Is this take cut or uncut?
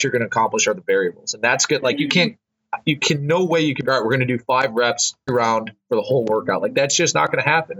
cut